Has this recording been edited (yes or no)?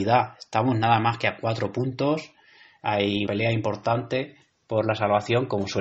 yes